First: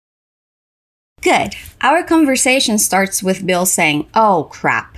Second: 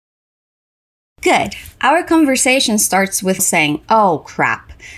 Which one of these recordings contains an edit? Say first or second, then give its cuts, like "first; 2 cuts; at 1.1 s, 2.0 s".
second; 1 cut; at 3.4 s